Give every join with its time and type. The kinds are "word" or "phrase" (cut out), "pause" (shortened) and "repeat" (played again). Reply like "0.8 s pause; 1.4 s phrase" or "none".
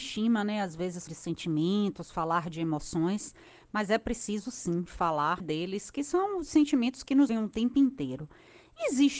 1.1 s word; 5.4 s word; 7.3 s word